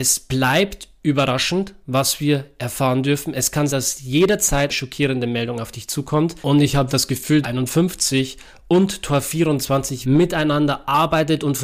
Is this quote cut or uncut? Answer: cut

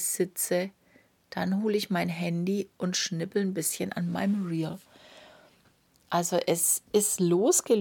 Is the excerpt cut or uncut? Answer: uncut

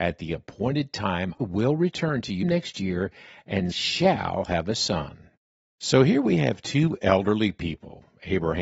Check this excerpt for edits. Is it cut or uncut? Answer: cut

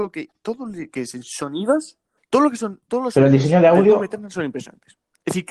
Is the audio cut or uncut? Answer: cut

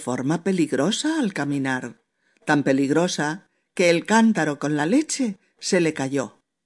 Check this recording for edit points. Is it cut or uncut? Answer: uncut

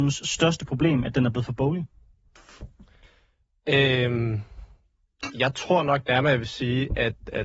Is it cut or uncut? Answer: uncut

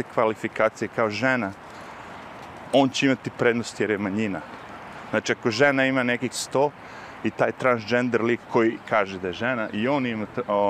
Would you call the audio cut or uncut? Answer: cut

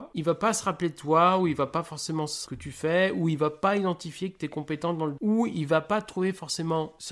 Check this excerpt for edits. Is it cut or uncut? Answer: cut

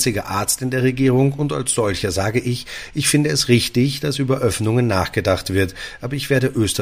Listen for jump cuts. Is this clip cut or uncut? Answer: uncut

